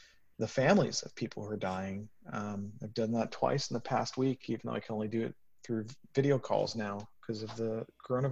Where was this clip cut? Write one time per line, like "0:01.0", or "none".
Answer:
none

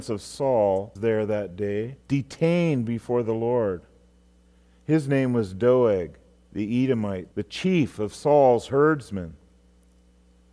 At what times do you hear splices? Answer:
0:01.0
0:02.0
0:07.3

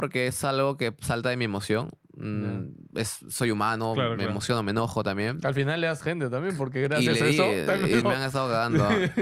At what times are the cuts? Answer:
0:06.0
0:08.0

